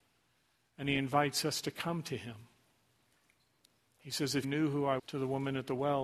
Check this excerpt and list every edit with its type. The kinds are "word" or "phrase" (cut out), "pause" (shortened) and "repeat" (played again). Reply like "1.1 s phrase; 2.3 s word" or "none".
4.4 s word; 5.0 s word